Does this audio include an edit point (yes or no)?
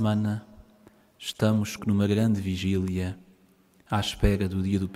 yes